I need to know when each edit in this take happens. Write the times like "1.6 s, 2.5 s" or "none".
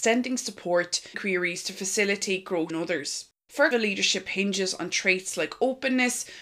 1.1 s, 2.7 s, 3.7 s